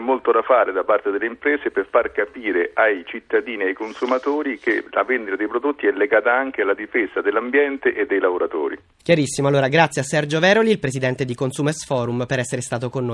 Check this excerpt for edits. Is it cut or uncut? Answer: uncut